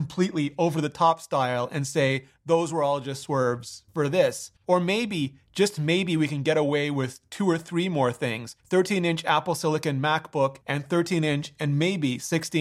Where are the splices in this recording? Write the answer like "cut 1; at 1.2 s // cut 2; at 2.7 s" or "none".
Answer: cut 1; at 3.9 s // cut 2; at 4.6 s // cut 3; at 8.6 s // cut 4; at 10.6 s